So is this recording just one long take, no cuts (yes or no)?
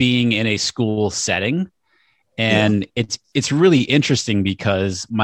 yes